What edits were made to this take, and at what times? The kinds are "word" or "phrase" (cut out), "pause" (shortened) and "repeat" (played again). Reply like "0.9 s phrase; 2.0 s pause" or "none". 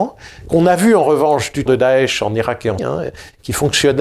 1.7 s word; 2.8 s word